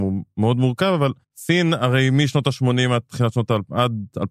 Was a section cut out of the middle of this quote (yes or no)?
yes